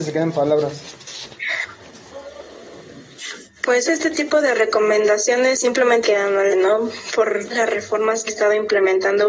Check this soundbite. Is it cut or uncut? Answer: cut